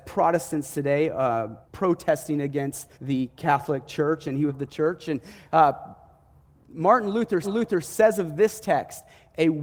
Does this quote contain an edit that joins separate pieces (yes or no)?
yes